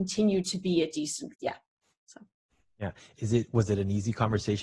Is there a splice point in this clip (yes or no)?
yes